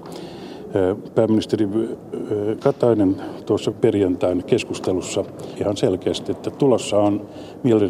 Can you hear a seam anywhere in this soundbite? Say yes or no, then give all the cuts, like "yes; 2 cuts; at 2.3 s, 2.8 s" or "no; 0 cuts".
yes; 3 cuts; at 2.6 s, 3.7 s, 5.6 s